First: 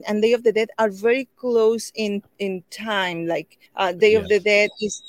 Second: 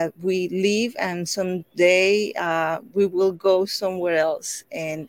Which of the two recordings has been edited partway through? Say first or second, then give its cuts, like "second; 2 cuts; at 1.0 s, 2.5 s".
first; 1 cut; at 3.7 s